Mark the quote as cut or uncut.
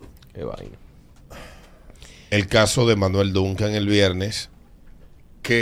uncut